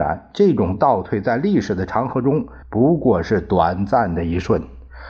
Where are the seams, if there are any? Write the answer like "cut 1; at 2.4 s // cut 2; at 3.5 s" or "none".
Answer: cut 1; at 2.6 s